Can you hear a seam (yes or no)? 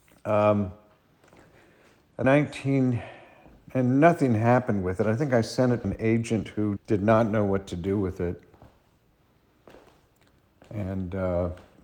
yes